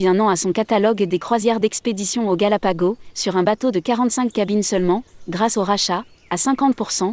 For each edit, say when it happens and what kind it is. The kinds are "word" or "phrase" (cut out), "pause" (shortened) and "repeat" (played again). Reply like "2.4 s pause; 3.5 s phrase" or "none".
none